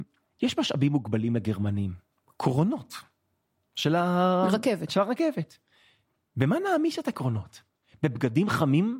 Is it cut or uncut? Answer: uncut